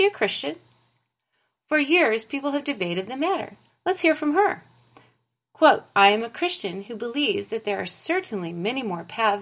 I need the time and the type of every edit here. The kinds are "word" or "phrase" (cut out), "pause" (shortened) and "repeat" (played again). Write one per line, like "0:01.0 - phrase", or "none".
0:03.7 - pause
0:05.9 - pause

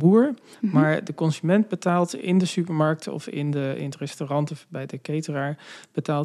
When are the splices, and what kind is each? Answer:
none

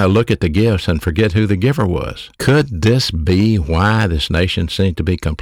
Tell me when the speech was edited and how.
0:02.3 - pause

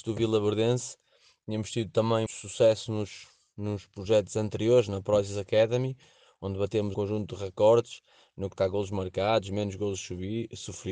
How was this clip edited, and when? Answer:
0:02.3 - word
0:06.9 - word
0:08.6 - word

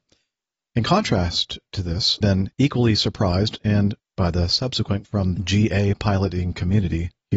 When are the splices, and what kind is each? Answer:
0:02.2 - word
0:02.5 - pause
0:04.0 - word
0:05.0 - word
0:05.4 - word

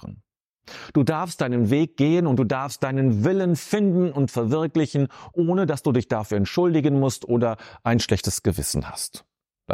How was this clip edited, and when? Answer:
none

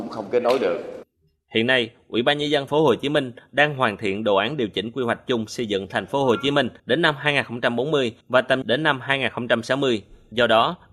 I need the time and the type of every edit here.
0:02.7 - word
0:06.8 - pause
0:08.2 - pause
0:08.6 - word

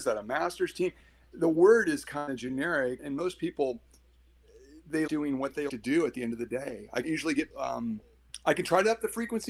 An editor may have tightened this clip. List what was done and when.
0:03.0 - word
0:05.1 - word
0:05.7 - word
0:07.0 - word
0:07.5 - word

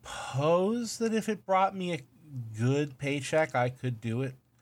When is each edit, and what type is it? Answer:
none

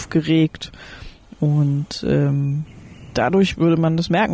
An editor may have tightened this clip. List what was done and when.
none

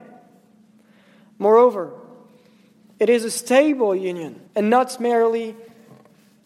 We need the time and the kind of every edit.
0:04.5 - pause

